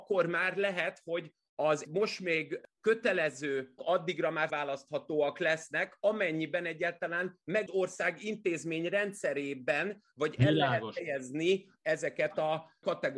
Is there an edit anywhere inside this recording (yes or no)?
yes